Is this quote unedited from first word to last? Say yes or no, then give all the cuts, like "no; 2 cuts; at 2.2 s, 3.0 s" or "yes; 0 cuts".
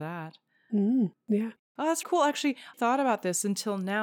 no; 3 cuts; at 1.2 s, 2.0 s, 2.7 s